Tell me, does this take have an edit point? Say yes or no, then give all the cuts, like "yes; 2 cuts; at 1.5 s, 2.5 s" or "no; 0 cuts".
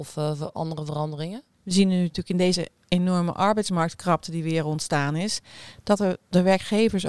no; 0 cuts